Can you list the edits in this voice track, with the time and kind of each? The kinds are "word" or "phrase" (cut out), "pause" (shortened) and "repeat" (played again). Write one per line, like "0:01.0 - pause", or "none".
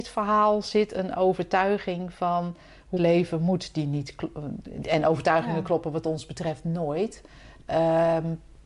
0:03.0 - word